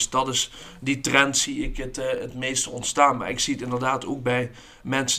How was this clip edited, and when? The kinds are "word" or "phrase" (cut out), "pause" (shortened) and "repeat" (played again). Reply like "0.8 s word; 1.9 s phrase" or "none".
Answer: none